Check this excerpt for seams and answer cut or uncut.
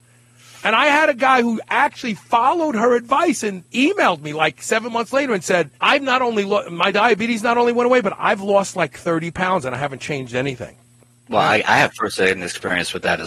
cut